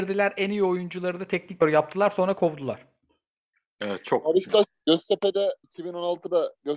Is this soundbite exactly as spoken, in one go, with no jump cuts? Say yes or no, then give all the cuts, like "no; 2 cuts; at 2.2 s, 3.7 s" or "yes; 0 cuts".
no; 3 cuts; at 1.6 s, 4.5 s, 5.6 s